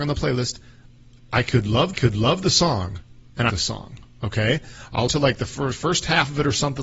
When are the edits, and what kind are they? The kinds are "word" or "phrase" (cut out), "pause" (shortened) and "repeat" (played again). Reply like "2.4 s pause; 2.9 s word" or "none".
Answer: 1.9 s repeat; 3.5 s phrase; 5.1 s word